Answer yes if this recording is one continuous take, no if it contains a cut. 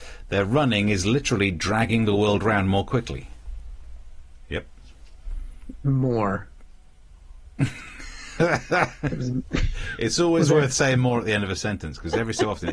yes